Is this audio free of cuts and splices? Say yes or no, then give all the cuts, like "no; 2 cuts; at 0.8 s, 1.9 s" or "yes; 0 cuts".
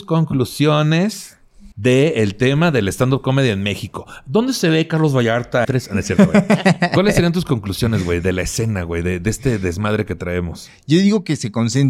no; 2 cuts; at 1.7 s, 5.6 s